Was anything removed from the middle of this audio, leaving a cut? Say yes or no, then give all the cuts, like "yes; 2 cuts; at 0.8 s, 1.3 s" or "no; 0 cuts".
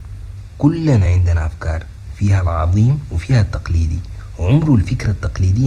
no; 0 cuts